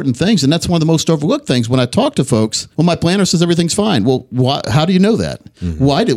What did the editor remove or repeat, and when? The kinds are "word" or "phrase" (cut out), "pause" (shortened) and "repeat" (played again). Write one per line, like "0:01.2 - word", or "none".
0:02.7 - pause